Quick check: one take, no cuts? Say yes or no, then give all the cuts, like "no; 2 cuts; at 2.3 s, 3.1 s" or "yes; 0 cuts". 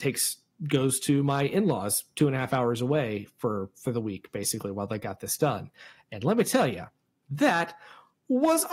yes; 0 cuts